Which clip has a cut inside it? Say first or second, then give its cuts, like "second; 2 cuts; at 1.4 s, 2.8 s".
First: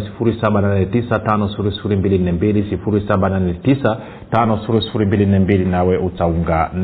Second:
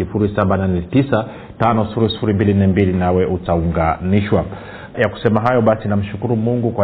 second; 1 cut; at 4.9 s